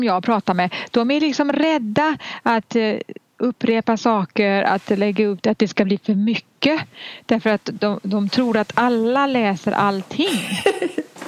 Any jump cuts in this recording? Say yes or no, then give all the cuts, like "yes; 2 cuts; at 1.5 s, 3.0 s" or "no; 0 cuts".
no; 0 cuts